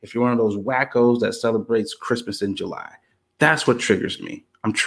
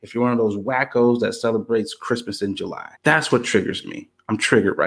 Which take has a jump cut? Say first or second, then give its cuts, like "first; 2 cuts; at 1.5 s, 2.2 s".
second; 1 cut; at 3.0 s